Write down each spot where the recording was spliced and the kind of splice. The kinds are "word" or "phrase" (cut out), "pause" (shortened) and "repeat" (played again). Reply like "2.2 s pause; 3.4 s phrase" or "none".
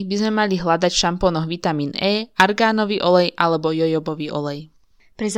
none